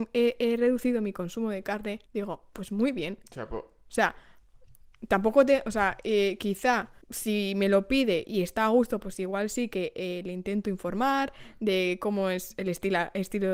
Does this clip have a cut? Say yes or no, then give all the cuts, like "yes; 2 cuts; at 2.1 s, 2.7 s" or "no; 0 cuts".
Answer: yes; 2 cuts; at 2.1 s, 7.0 s